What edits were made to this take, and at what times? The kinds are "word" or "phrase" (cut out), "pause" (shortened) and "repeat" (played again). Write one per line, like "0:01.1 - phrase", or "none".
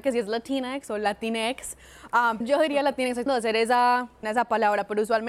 0:02.4 - word
0:03.3 - word
0:04.2 - word